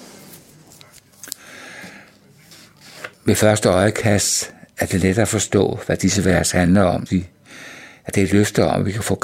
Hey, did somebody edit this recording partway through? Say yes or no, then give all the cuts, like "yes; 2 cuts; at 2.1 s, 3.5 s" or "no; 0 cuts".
yes; 2 cuts; at 3.1 s, 7.1 s